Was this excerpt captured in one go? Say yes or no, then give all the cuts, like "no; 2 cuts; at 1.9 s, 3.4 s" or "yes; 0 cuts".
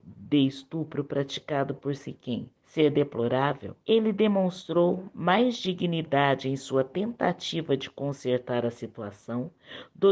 no; 2 cuts; at 2.6 s, 3.8 s